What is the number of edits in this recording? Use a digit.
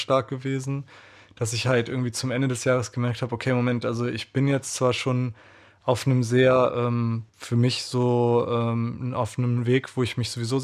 1